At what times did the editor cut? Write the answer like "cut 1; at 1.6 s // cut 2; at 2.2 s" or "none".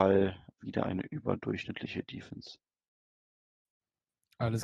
none